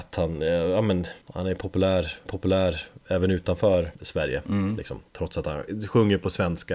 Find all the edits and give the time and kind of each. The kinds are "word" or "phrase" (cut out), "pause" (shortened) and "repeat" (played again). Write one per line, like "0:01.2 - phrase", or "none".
0:01.2 - pause
0:02.3 - repeat
0:03.9 - pause
0:05.1 - pause